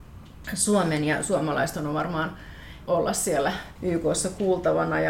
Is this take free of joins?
no; 1 cut; at 2.9 s

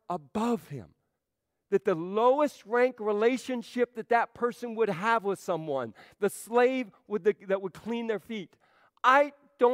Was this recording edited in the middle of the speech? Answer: yes; 1 cut; at 1.2 s

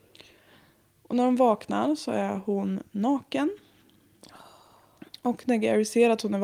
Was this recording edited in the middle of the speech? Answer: no; 0 cuts

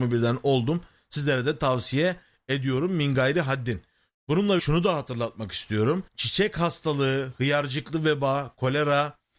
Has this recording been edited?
yes; 2 cuts; at 4.6 s, 6.1 s

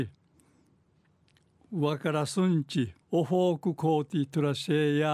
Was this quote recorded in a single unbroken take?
no; 1 cut; at 3.0 s

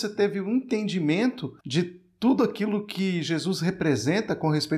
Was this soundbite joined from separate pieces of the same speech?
yes; 1 cut; at 1.6 s

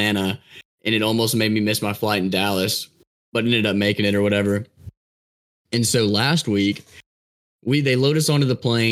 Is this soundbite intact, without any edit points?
yes; 0 cuts

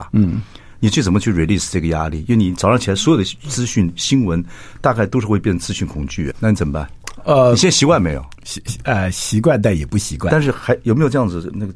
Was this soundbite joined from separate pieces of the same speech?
yes; 1 cut; at 6.3 s

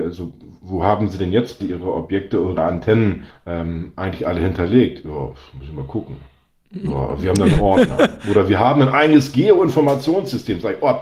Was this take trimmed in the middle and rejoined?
yes; 3 cuts; at 1.6 s, 2.6 s, 3.3 s

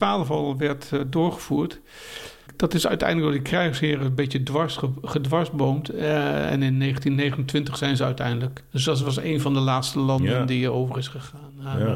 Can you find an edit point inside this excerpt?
no; 0 cuts

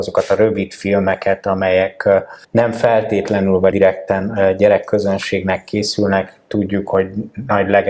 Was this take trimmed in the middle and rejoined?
yes; 2 cuts; at 2.4 s, 3.7 s

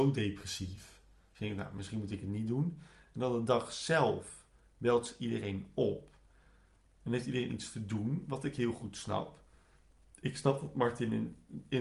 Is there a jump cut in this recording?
no; 0 cuts

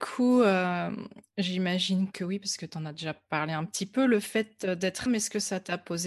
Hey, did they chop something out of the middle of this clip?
yes; 2 cuts; at 2.1 s, 5.1 s

